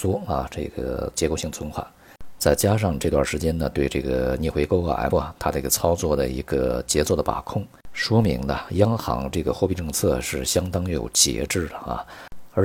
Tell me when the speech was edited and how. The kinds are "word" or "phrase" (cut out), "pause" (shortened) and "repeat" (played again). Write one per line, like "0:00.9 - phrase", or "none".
0:05.1 - word